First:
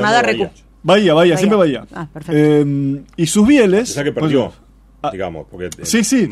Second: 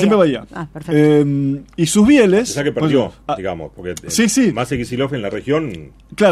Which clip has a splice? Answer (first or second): second